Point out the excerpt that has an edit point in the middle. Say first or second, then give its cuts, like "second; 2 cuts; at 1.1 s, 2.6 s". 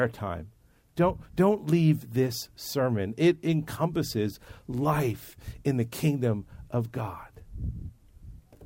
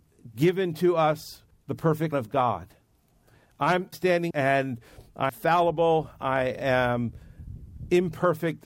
second; 5 cuts; at 1.5 s, 2.1 s, 3.9 s, 4.3 s, 5.3 s